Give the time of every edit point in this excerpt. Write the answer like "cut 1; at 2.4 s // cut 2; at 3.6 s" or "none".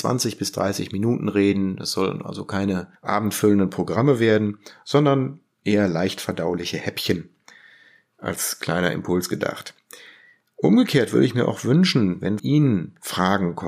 cut 1; at 3.0 s // cut 2; at 12.4 s